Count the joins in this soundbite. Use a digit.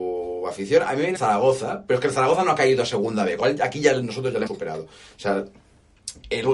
3